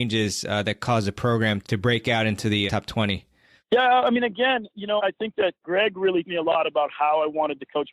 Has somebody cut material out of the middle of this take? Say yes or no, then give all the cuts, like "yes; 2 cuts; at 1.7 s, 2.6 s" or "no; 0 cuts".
yes; 4 cuts; at 1.6 s, 2.7 s, 5.0 s, 6.2 s